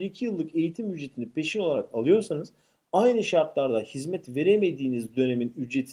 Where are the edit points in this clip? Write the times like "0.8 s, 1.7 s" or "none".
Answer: none